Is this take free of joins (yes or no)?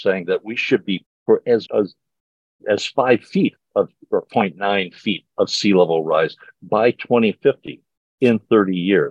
no